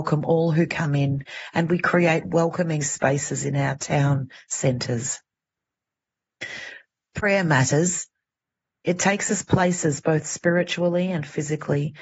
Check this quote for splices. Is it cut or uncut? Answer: uncut